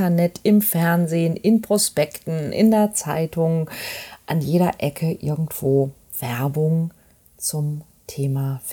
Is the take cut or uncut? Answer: cut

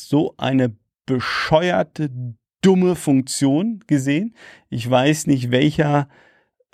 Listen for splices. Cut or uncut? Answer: uncut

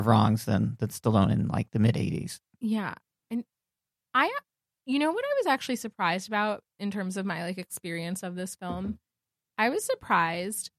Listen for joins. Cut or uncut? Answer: uncut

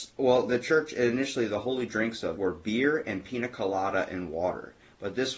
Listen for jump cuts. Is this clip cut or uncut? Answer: cut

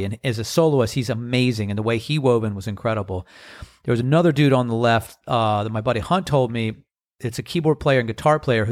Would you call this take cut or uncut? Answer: uncut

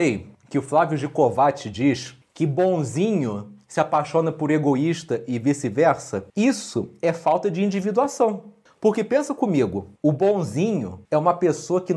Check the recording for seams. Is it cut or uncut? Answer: cut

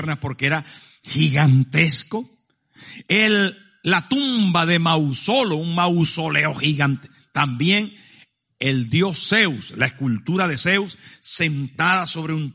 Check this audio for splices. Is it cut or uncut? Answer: uncut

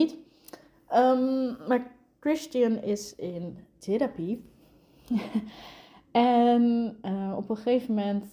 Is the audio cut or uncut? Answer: uncut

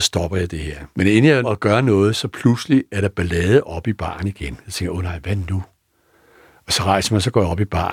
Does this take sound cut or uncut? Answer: cut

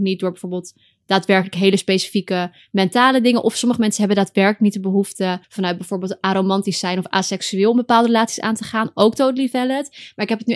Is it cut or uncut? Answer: cut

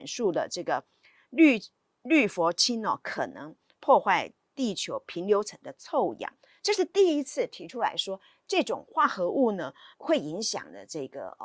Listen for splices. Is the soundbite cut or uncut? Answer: cut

